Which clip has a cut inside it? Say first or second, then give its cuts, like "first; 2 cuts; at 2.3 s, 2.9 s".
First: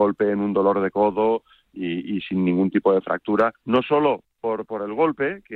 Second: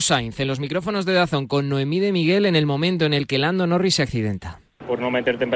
first; 1 cut; at 3.5 s